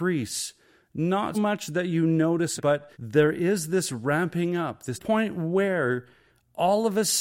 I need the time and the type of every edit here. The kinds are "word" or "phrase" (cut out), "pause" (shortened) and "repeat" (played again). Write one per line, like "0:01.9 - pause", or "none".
0:01.3 - word
0:02.6 - word
0:02.9 - pause
0:04.9 - phrase